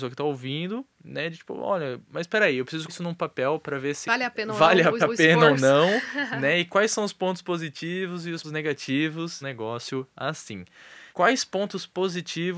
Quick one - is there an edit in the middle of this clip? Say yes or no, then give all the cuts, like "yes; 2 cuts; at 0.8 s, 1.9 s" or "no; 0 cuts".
yes; 7 cuts; at 2.0 s, 2.9 s, 4.1 s, 5.0 s, 8.4 s, 9.4 s, 11.1 s